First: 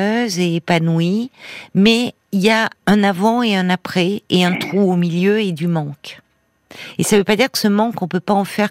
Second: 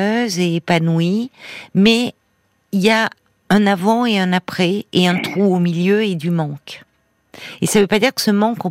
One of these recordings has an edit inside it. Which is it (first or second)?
first